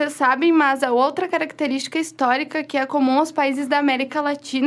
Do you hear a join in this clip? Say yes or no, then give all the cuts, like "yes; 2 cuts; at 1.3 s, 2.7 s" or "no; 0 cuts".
no; 0 cuts